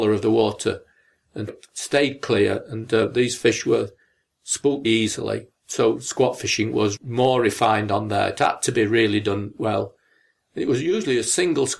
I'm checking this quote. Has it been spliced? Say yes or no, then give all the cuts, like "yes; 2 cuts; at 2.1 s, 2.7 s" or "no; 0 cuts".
yes; 3 cuts; at 1.5 s, 4.8 s, 7.0 s